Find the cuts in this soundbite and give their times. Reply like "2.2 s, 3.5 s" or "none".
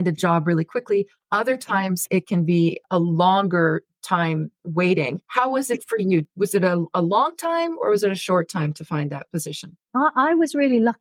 9.8 s